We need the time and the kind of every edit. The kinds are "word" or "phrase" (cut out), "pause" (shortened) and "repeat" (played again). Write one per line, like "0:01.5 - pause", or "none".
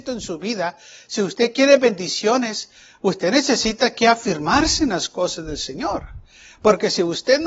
none

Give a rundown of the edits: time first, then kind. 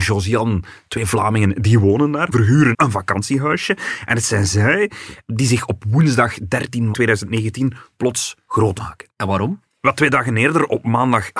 0:02.3 - word
0:02.7 - word
0:06.9 - word
0:08.8 - word

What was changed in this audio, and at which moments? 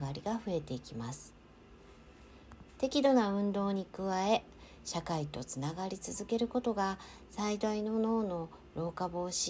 0:02.7 - pause

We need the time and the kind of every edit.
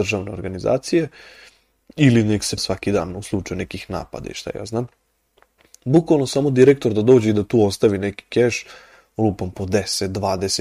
0:02.6 - word

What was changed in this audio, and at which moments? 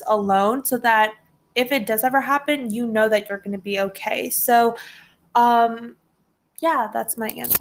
none

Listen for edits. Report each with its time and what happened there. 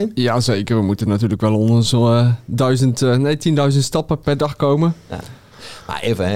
0:04.2 - word

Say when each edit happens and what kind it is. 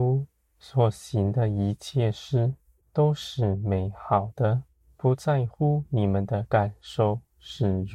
0:02.8 - pause
0:04.7 - pause

